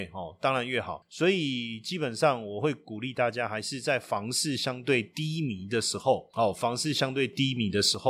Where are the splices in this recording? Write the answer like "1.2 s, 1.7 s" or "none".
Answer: none